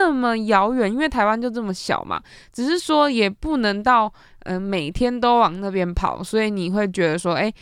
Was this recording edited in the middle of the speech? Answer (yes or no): no